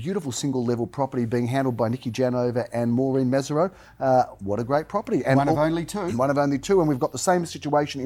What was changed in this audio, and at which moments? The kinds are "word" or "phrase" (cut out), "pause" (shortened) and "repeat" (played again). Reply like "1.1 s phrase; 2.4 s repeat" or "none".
none

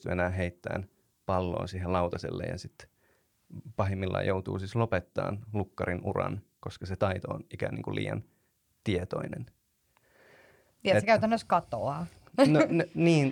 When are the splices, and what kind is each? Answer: none

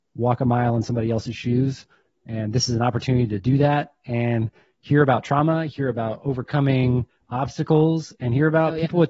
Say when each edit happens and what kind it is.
none

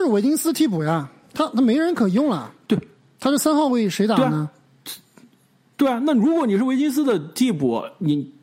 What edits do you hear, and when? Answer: none

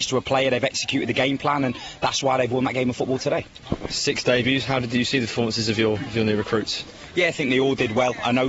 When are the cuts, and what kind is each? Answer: none

